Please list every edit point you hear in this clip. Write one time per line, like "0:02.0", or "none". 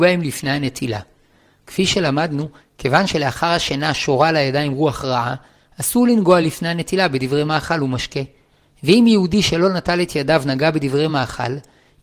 none